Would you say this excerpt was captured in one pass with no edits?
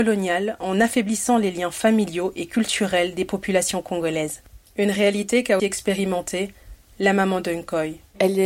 no; 1 cut; at 5.6 s

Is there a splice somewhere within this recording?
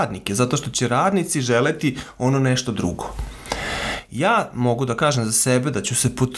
no; 0 cuts

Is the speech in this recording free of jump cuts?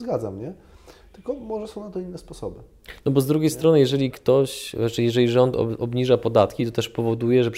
yes; 0 cuts

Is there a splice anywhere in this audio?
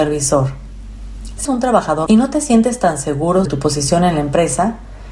yes; 3 cuts; at 1.5 s, 2.1 s, 3.5 s

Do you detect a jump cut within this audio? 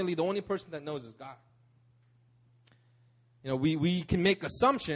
no; 0 cuts

